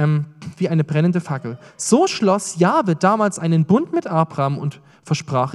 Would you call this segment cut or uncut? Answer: uncut